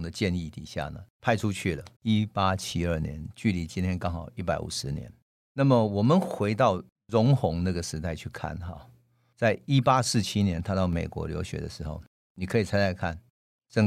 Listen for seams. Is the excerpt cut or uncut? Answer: cut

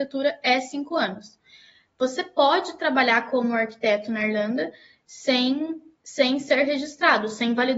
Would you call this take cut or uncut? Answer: uncut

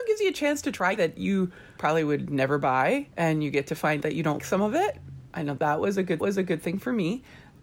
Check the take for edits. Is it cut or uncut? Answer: cut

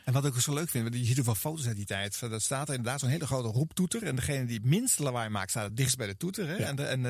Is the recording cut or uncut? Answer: uncut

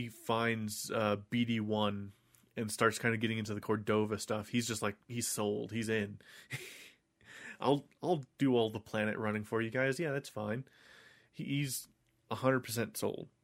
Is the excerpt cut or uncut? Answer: uncut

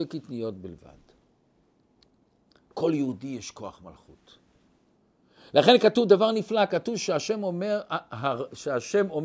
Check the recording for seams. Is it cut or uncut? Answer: uncut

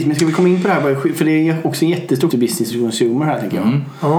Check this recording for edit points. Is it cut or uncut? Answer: cut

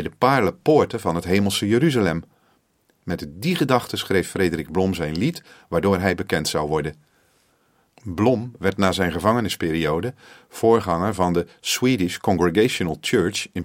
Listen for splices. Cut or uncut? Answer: uncut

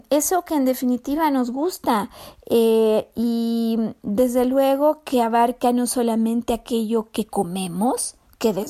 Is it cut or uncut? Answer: uncut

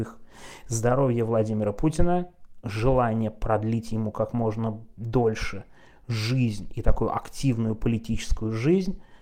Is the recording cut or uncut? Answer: uncut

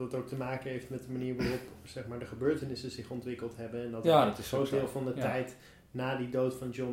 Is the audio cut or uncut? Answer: uncut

